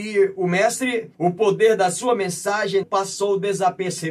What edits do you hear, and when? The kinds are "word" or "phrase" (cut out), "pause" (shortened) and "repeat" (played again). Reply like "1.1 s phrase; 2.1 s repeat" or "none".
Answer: 1.1 s pause; 2.8 s word